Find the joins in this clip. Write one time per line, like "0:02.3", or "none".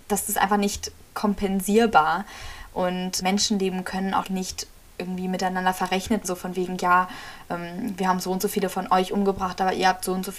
0:03.2
0:04.2
0:06.2